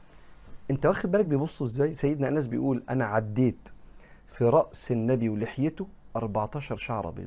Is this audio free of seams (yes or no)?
yes